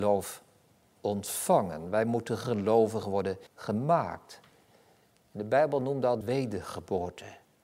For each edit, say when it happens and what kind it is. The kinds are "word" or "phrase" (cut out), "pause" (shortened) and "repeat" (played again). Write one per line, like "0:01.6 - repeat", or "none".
0:03.5 - pause
0:06.2 - word